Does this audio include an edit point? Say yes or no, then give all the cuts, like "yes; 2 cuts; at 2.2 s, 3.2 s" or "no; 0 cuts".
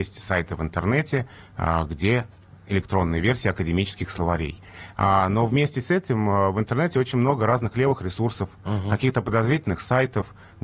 no; 0 cuts